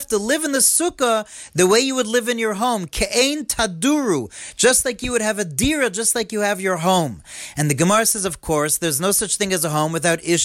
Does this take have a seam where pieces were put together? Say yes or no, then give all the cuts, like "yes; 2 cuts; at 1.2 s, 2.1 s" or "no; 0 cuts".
no; 0 cuts